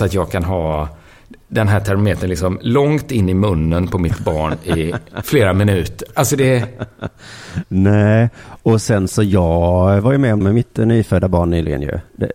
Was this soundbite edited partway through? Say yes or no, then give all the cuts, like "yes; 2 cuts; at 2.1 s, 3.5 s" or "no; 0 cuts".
yes; 2 cuts; at 1.4 s, 10.4 s